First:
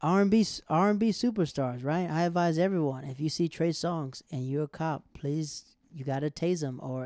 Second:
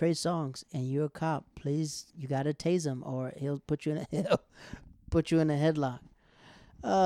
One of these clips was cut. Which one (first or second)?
second